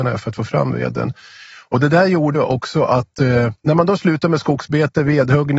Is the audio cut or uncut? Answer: cut